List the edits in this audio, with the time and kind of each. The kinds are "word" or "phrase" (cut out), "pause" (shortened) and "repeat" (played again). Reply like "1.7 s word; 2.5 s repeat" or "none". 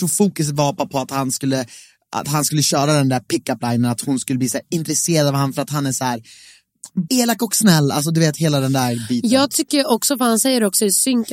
7.1 s word

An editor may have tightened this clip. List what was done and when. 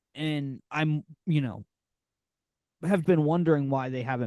3.0 s word

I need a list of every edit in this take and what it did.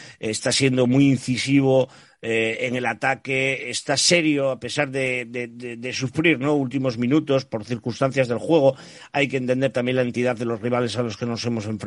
none

